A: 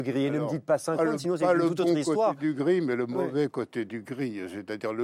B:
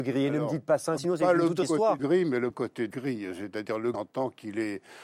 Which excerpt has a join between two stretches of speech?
B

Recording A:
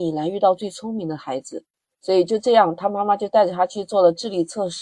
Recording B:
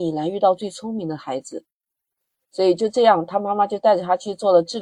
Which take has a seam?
A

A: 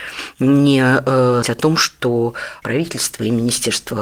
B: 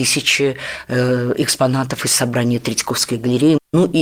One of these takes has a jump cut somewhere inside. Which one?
A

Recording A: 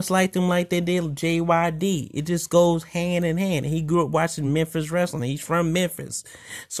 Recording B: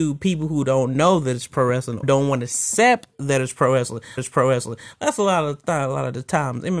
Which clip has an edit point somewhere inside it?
B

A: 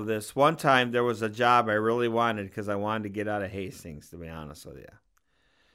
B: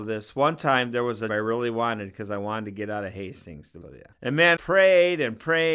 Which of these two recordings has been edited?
B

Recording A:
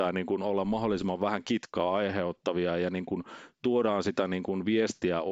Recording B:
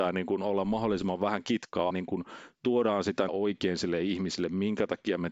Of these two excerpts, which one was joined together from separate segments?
B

